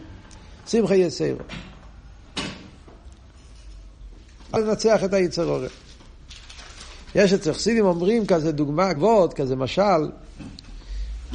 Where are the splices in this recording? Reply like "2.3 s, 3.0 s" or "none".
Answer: 4.6 s, 9.0 s